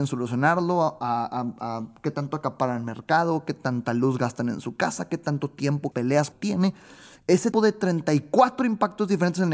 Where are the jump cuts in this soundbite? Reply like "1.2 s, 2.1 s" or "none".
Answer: 5.9 s, 6.3 s, 7.5 s